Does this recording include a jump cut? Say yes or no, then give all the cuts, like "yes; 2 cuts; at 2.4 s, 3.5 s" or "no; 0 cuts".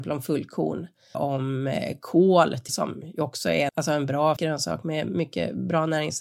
yes; 4 cuts; at 1.1 s, 2.7 s, 3.7 s, 4.4 s